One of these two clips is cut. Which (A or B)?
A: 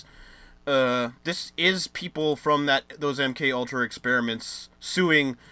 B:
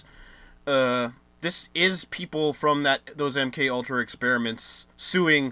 A